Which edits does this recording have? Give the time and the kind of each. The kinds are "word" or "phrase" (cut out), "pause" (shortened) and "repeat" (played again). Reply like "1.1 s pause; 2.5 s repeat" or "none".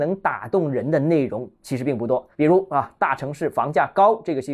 2.3 s pause